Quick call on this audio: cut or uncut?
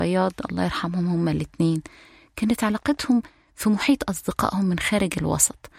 uncut